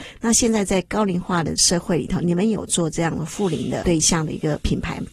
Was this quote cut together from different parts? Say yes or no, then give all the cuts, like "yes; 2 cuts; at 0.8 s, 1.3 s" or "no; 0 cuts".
no; 0 cuts